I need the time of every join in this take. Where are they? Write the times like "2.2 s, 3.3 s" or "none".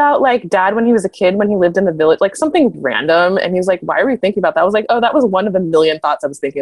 2.7 s